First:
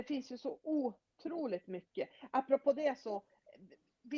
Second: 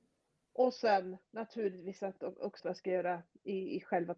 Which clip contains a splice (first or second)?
second